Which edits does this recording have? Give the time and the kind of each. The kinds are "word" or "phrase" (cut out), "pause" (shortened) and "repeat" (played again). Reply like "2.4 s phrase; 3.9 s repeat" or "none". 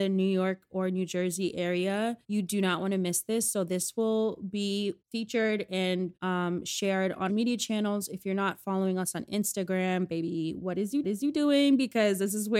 2.2 s pause; 5.0 s pause; 6.2 s pause; 7.3 s phrase; 11.0 s repeat